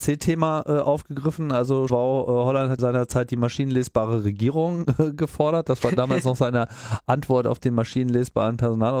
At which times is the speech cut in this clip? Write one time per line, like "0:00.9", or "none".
0:01.9
0:02.8